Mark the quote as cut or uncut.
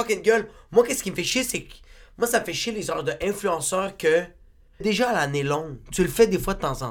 cut